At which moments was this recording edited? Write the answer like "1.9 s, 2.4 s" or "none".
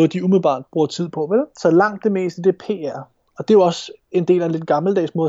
none